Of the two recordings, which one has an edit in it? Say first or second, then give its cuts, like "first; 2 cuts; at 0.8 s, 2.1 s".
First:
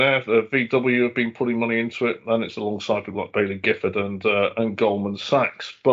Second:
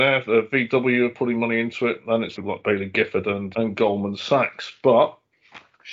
second; 3 cuts; at 1.1 s, 2.4 s, 3.5 s